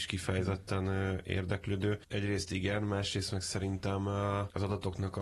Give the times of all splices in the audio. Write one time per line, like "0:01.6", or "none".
none